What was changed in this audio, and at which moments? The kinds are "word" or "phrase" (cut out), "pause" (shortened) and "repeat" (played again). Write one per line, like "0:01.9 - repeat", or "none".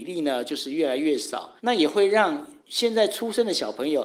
0:01.6 - pause
0:02.6 - pause